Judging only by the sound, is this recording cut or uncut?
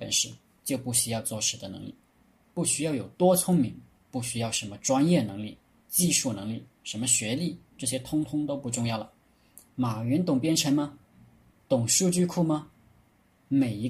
uncut